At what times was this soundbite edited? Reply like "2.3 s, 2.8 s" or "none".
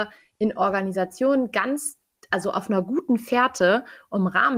none